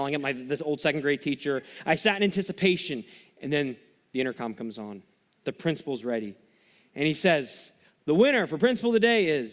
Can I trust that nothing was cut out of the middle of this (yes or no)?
yes